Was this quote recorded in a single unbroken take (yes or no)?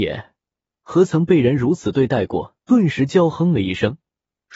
no